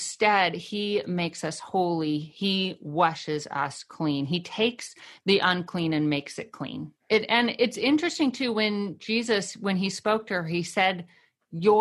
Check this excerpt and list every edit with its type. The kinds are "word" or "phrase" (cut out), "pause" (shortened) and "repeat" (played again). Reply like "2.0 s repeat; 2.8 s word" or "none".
7.0 s pause